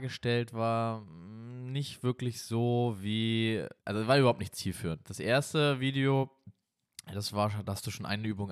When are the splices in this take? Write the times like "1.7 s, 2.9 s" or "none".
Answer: 3.8 s